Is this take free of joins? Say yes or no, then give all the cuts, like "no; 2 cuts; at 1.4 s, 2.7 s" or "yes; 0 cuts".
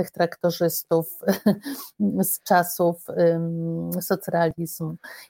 yes; 0 cuts